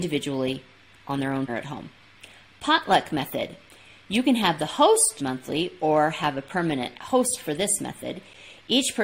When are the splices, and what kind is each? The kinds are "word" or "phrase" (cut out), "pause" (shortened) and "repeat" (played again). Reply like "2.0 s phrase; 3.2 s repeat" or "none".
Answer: 1.5 s word; 5.2 s word